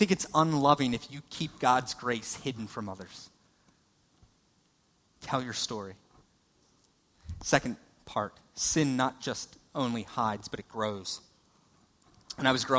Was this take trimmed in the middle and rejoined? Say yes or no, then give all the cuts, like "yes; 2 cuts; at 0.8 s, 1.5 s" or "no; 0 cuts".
no; 0 cuts